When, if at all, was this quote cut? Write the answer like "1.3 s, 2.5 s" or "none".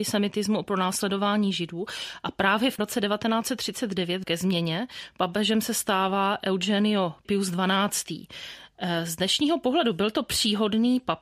2.8 s, 4.2 s, 7.2 s